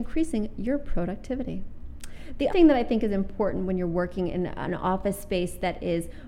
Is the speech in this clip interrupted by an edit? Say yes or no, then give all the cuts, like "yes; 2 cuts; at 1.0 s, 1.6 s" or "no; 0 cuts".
yes; 1 cut; at 2.5 s